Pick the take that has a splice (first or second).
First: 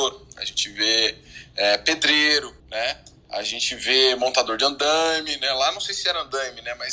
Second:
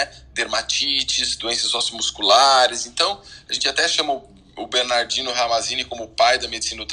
first